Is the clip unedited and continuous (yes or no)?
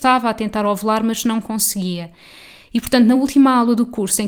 yes